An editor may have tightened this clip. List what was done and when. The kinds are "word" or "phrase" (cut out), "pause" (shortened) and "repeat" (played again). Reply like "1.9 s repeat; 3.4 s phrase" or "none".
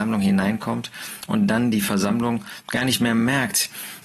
none